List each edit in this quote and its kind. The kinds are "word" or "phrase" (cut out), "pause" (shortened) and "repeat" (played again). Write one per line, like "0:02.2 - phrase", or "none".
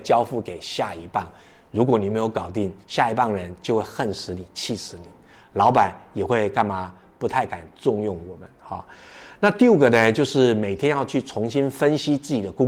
0:02.8 - pause